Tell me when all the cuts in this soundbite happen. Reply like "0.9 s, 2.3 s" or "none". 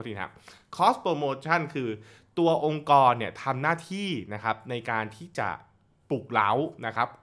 none